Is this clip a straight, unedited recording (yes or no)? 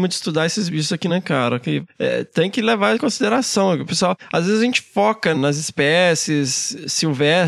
no